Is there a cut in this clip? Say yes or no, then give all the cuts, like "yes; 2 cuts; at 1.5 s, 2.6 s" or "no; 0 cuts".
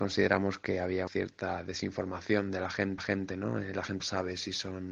yes; 3 cuts; at 1.1 s, 3.0 s, 4.0 s